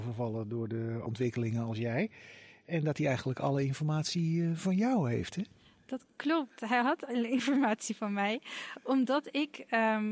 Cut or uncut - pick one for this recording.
uncut